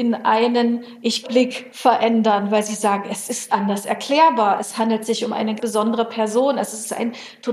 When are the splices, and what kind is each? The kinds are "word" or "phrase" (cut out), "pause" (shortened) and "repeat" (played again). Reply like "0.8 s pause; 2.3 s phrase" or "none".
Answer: 1.2 s word; 3.5 s word; 5.6 s word